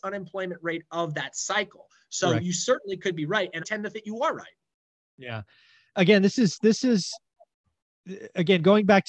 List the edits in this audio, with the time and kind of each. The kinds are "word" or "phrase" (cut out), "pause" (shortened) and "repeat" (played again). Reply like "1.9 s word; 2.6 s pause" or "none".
3.6 s word; 3.9 s word